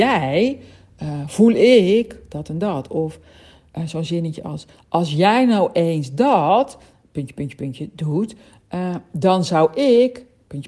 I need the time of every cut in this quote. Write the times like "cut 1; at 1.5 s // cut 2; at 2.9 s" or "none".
none